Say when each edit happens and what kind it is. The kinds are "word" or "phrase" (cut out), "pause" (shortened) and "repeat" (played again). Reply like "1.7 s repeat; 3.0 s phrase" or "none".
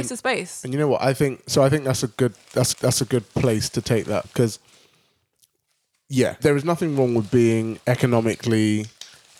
2.7 s repeat; 4.2 s word; 6.4 s word; 7.8 s pause